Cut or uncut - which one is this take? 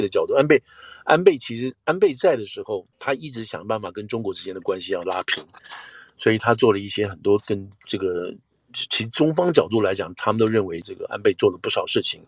cut